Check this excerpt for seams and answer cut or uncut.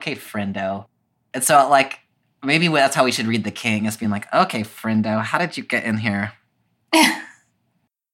uncut